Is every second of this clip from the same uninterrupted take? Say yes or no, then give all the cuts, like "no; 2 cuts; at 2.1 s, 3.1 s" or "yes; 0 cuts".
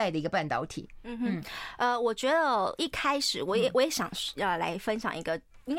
yes; 0 cuts